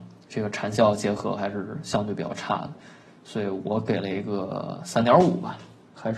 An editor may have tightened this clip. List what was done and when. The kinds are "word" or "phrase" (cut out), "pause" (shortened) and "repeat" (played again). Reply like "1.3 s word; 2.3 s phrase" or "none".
none